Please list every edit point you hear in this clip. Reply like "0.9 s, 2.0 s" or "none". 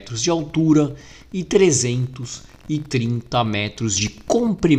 none